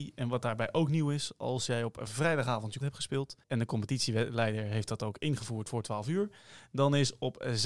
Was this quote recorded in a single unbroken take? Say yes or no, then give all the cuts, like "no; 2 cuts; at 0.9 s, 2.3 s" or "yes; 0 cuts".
no; 2 cuts; at 2.8 s, 3.4 s